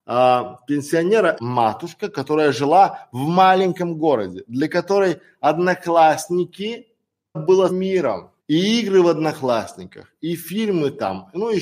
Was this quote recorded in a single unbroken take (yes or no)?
no